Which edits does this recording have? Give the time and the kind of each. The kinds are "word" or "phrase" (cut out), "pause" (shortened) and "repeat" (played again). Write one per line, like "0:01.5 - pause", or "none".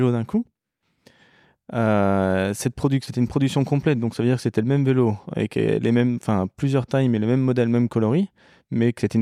0:03.1 - word